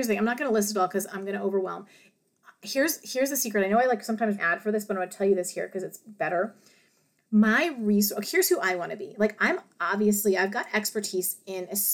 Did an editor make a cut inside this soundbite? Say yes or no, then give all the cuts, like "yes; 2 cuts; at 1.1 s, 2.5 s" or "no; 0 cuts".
yes; 2 cuts; at 4.4 s, 8.2 s